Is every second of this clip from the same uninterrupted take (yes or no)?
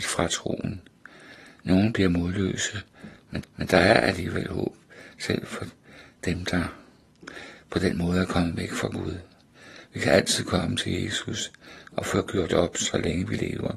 no